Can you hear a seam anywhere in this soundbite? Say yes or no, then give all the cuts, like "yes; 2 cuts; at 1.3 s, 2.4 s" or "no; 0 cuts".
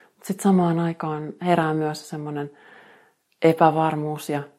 no; 0 cuts